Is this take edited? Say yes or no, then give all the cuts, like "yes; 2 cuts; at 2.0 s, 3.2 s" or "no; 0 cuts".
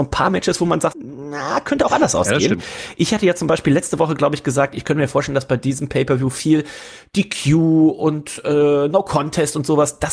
yes; 1 cut; at 0.9 s